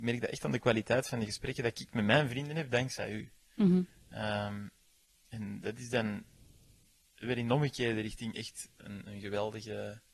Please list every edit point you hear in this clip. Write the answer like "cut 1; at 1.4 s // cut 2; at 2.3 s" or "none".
none